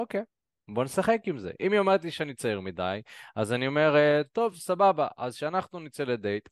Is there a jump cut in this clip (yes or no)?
no